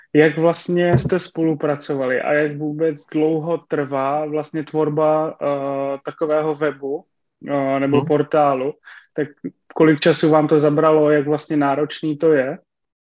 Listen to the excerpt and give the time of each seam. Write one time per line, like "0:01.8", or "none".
0:03.0